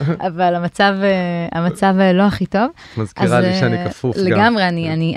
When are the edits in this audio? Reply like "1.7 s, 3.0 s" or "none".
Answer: none